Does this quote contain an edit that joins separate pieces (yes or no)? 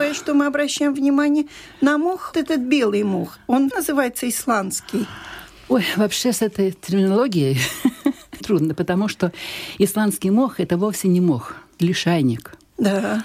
yes